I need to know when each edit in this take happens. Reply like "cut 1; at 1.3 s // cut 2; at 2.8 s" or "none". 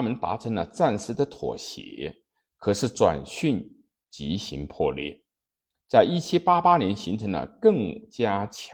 none